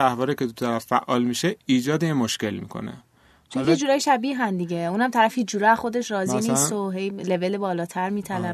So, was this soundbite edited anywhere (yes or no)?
no